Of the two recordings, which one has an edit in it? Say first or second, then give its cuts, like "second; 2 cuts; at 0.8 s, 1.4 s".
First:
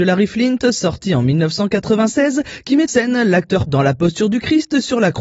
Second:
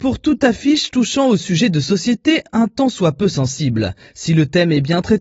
first; 2 cuts; at 2.9 s, 3.7 s